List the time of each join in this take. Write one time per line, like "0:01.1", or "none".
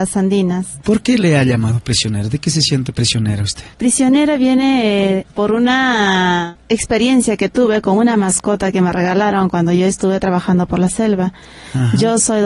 none